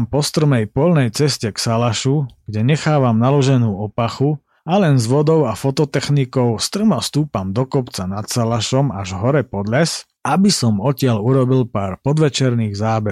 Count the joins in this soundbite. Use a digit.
2